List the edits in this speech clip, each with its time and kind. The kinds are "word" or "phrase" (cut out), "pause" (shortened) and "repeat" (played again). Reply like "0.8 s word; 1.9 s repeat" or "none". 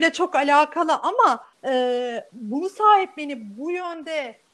1.5 s pause